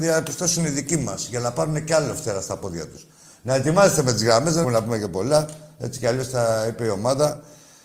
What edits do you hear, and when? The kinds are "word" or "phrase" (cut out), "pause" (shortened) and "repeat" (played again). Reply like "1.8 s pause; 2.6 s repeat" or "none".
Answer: 4.6 s word